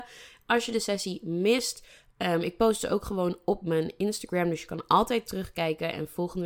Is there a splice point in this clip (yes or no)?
no